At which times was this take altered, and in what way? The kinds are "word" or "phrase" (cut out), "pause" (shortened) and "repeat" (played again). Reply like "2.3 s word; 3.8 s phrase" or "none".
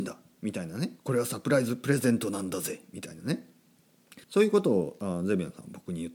1.0 s pause; 4.2 s pause